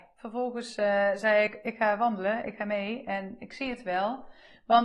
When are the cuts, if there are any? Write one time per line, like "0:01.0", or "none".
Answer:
none